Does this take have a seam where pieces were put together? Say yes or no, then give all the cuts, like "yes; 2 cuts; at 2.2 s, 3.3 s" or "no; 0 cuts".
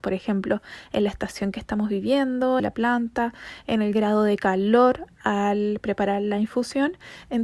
yes; 1 cut; at 2.6 s